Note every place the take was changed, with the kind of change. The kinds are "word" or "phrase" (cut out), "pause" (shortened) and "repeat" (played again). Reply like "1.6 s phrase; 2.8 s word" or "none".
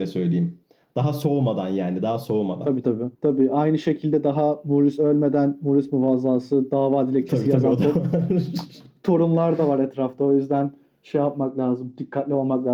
3.1 s pause